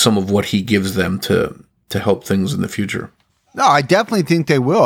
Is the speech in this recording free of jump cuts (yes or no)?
yes